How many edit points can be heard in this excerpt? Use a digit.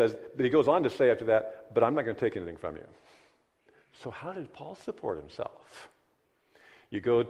0